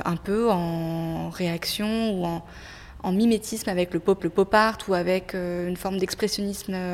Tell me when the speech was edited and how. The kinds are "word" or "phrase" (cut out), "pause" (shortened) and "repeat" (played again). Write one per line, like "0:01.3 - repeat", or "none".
0:04.2 - repeat